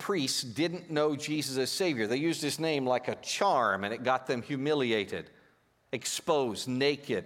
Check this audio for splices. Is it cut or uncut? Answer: uncut